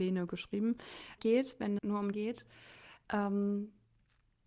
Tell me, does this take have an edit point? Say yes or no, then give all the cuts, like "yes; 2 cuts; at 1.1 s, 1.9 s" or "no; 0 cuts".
yes; 3 cuts; at 1.2 s, 1.8 s, 2.1 s